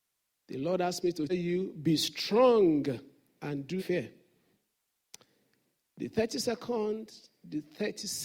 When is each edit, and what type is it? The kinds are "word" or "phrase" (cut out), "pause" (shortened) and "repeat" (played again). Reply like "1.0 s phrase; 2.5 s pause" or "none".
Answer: 1.3 s word; 3.8 s word